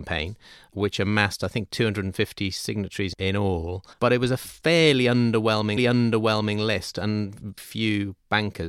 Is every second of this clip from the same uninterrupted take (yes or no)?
no